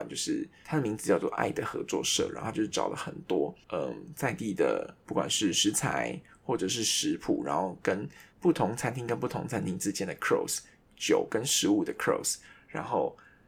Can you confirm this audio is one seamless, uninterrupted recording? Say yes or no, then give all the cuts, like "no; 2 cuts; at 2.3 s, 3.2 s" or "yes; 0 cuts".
no; 1 cut; at 8.3 s